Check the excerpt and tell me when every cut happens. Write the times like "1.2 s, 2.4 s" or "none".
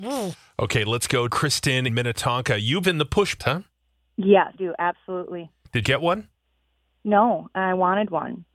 1.3 s, 1.9 s, 2.8 s, 3.4 s, 4.6 s, 5.8 s

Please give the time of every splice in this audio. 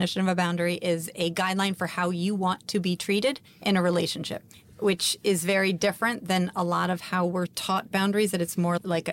none

